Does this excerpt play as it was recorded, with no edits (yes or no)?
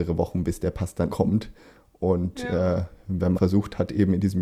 no